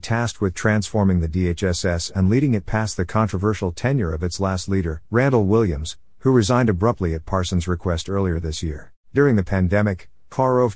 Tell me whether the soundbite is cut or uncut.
cut